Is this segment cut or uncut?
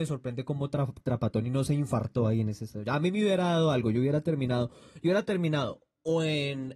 uncut